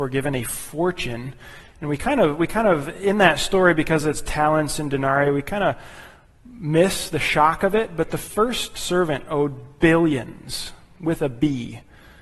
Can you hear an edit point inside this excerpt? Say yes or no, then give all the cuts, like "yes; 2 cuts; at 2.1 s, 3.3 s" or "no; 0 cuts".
no; 0 cuts